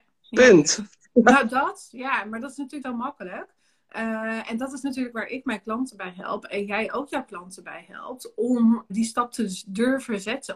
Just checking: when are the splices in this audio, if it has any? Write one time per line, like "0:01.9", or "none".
0:02.8
0:05.1
0:08.9